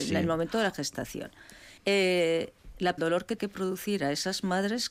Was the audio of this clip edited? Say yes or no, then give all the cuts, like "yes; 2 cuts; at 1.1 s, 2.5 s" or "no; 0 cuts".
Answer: yes; 3 cuts; at 1.8 s, 3.0 s, 3.4 s